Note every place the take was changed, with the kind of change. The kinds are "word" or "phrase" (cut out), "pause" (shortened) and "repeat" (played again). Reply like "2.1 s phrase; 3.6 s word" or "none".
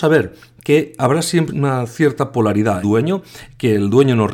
1.5 s word; 2.8 s phrase